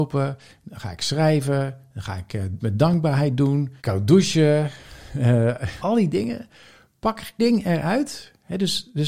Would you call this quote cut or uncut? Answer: cut